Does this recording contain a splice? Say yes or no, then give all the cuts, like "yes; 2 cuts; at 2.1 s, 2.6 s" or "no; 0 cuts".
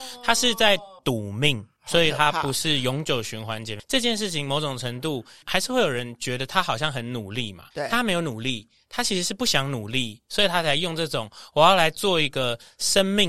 yes; 2 cuts; at 1.0 s, 7.7 s